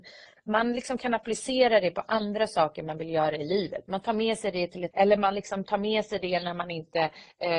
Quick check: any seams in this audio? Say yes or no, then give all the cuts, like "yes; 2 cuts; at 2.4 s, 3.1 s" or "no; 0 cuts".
yes; 1 cut; at 4.9 s